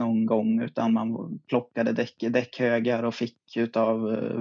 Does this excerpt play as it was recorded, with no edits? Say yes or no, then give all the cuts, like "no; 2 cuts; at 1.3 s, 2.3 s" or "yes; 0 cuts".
yes; 0 cuts